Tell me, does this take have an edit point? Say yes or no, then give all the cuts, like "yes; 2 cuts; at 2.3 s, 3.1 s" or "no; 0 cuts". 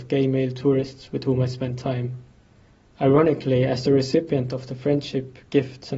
no; 0 cuts